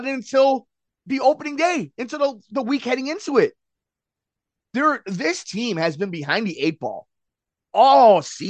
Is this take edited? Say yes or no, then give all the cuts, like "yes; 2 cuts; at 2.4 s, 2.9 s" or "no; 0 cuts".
no; 0 cuts